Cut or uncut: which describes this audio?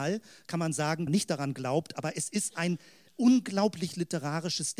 cut